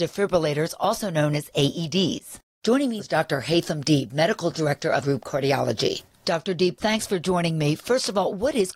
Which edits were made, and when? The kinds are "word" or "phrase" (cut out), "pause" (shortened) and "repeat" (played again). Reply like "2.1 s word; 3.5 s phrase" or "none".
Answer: 3.0 s word; 5.0 s phrase